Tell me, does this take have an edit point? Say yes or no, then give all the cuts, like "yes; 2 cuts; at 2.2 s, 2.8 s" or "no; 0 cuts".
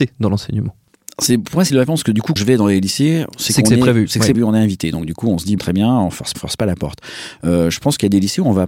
yes; 5 cuts; at 1.7 s, 2.4 s, 4.3 s, 5.6 s, 6.3 s